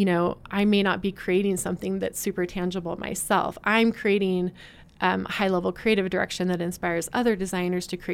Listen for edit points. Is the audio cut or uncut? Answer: uncut